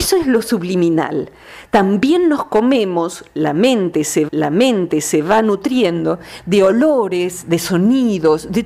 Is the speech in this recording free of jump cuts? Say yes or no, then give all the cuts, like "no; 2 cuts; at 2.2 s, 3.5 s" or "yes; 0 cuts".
no; 1 cut; at 4.3 s